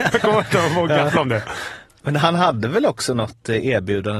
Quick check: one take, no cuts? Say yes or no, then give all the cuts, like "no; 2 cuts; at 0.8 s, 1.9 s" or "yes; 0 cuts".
no; 1 cut; at 1.9 s